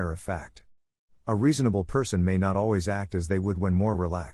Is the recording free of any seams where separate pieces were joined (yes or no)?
yes